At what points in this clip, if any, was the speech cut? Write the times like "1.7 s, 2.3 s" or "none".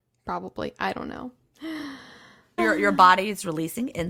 2.6 s